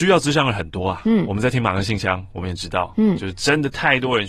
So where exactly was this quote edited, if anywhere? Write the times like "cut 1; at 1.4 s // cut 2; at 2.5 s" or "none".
none